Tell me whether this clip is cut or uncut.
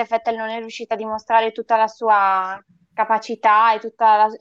uncut